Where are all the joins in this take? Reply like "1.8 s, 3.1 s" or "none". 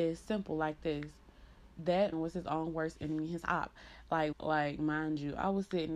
2.1 s, 4.3 s